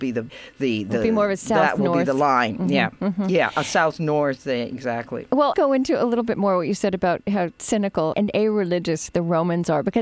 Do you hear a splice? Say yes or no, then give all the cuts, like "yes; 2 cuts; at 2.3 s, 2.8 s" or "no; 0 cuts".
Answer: yes; 2 cuts; at 5.5 s, 8.1 s